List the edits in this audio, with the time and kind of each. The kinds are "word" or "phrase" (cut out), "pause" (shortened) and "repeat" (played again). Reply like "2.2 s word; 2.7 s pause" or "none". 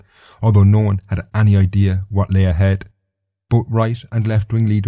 none

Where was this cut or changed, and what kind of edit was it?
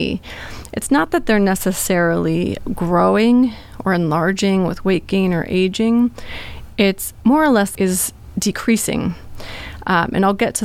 7.7 s phrase

